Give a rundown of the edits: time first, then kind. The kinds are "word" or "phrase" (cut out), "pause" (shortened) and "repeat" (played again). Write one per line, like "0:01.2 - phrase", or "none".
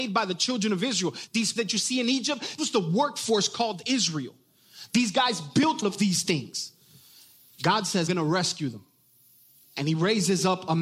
0:01.6 - word
0:02.6 - word
0:05.8 - word
0:08.1 - word